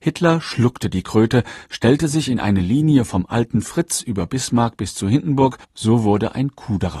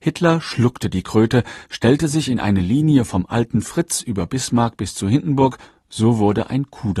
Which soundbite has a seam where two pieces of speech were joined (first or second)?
first